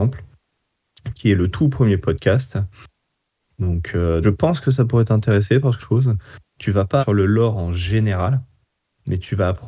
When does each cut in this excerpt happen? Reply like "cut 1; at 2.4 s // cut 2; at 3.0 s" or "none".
cut 1; at 1.5 s // cut 2; at 4.2 s // cut 3; at 5.8 s // cut 4; at 7.0 s